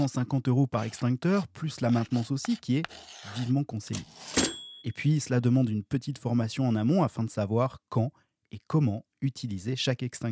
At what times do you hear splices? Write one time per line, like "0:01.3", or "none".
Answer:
0:04.8

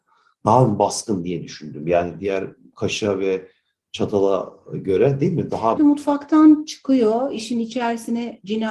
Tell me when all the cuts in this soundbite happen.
0:05.8

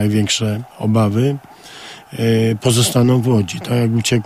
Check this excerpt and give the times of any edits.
none

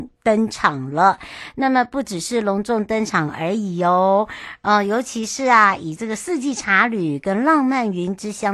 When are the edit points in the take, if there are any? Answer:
none

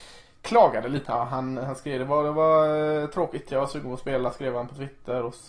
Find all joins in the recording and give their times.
0:01.0

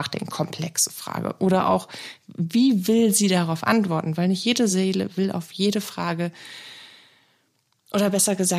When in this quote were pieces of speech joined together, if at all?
none

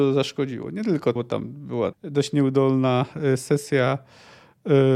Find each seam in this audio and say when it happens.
0:01.2
0:01.9

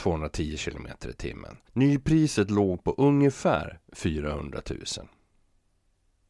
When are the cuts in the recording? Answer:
0:01.7

